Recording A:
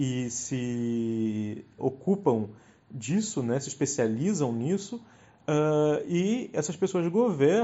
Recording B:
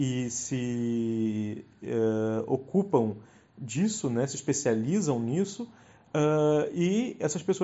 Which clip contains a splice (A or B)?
A